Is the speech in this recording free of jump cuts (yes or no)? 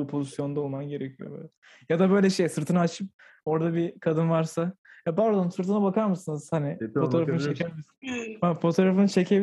yes